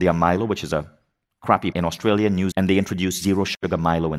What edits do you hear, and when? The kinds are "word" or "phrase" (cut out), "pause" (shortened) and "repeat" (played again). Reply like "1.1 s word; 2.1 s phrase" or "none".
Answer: 1.7 s word; 2.5 s word